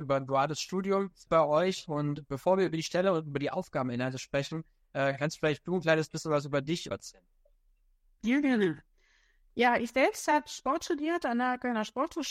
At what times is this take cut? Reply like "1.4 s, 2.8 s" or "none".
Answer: 1.3 s, 6.9 s